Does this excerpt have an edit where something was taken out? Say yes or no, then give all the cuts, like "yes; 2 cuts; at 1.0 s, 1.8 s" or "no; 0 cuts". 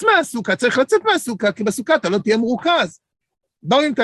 no; 0 cuts